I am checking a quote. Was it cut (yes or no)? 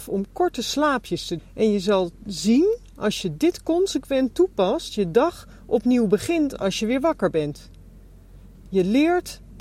yes